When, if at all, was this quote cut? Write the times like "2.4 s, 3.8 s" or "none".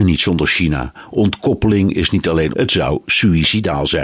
2.5 s